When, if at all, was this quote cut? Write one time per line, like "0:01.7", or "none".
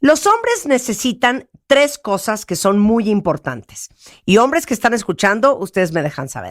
none